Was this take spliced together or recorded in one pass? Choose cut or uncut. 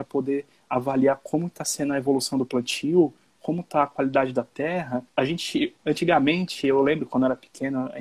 cut